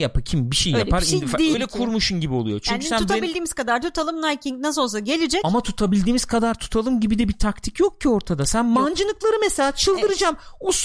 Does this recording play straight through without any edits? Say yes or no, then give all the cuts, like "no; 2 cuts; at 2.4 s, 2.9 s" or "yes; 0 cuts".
no; 1 cut; at 1.5 s